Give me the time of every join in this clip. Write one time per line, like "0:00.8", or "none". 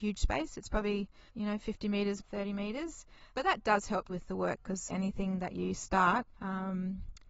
0:01.3
0:02.2
0:03.3
0:04.1
0:04.9
0:06.3